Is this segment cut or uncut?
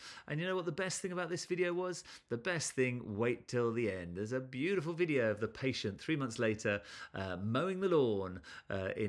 uncut